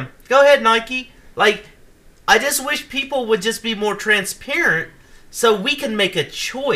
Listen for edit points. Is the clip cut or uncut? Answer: uncut